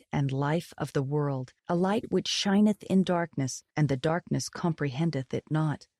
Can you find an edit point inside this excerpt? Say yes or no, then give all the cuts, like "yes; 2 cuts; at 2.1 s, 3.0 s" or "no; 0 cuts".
yes; 2 cuts; at 1.6 s, 3.7 s